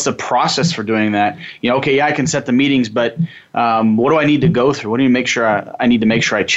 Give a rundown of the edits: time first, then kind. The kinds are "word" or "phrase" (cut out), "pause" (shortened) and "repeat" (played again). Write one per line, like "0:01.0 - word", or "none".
none